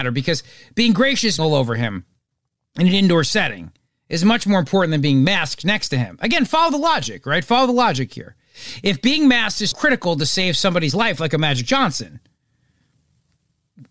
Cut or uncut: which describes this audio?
cut